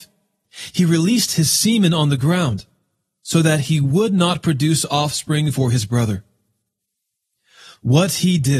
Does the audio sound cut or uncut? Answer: uncut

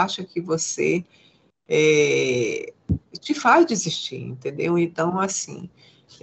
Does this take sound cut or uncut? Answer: uncut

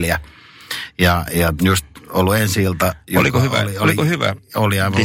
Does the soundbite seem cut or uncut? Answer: cut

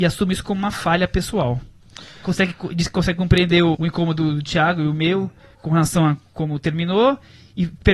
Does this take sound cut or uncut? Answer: cut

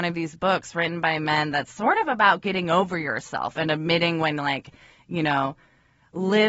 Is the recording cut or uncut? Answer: uncut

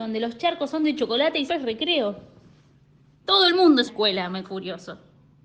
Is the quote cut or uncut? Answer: cut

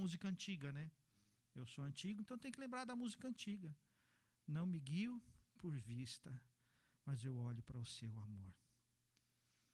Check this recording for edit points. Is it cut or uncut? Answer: uncut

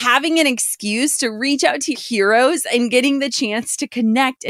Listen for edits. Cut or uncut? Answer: cut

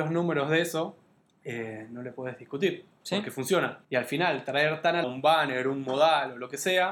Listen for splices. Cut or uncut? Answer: cut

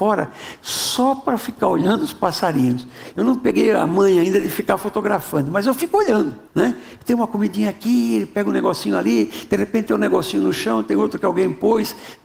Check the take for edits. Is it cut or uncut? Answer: cut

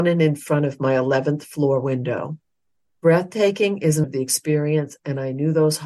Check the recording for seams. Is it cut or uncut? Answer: cut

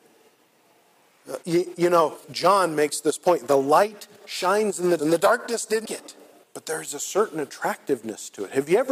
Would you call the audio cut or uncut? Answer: cut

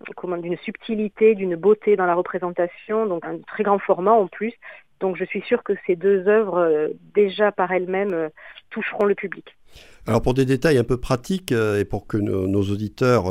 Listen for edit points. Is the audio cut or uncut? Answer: cut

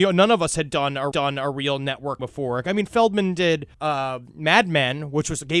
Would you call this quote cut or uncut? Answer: cut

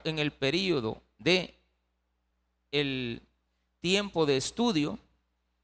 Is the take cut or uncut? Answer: cut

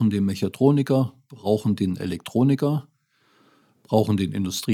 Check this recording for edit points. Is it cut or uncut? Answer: uncut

